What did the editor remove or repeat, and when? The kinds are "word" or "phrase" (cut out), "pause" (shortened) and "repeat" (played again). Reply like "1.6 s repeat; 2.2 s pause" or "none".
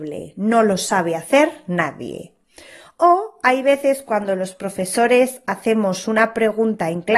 none